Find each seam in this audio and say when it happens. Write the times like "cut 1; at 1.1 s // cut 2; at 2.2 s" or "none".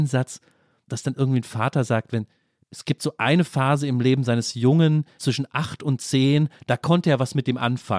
none